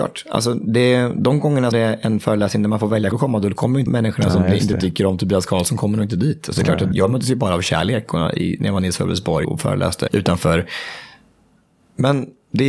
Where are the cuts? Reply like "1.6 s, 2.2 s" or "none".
1.7 s, 3.1 s, 3.9 s, 6.9 s, 9.4 s, 10.1 s